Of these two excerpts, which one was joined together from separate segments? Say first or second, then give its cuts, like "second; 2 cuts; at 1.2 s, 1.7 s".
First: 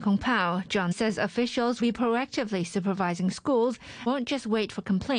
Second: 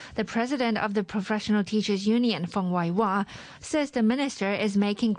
first; 3 cuts; at 0.9 s, 1.8 s, 4.1 s